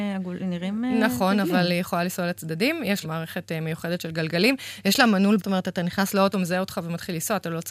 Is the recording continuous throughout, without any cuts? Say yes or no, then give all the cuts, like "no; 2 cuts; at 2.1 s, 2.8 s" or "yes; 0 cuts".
no; 3 cuts; at 3.0 s, 5.4 s, 6.3 s